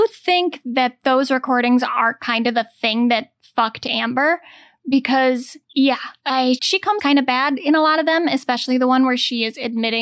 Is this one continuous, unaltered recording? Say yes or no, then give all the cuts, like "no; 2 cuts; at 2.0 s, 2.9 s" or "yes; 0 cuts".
no; 3 cuts; at 5.6 s, 6.6 s, 7.0 s